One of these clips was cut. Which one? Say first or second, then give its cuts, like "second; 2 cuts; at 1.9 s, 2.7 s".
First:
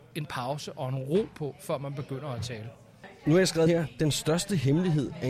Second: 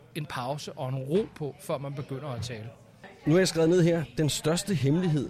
first; 1 cut; at 3.7 s